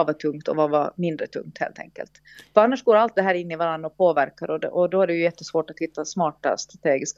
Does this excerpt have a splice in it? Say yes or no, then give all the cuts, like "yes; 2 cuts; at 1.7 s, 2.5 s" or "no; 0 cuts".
no; 0 cuts